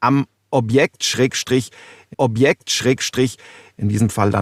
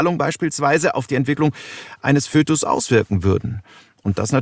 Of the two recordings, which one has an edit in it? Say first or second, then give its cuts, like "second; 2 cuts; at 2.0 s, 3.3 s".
first; 1 cut; at 2.1 s